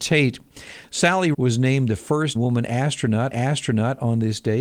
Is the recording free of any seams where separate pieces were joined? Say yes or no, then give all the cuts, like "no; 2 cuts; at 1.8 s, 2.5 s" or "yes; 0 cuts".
no; 3 cuts; at 1.3 s, 2.4 s, 3.3 s